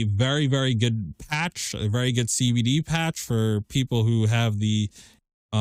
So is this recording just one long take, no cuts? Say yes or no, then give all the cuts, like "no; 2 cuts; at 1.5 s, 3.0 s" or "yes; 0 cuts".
yes; 0 cuts